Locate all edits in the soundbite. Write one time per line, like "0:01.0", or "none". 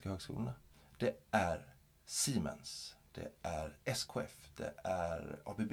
none